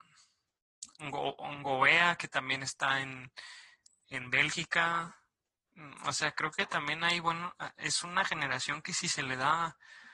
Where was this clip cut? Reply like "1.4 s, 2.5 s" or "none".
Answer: none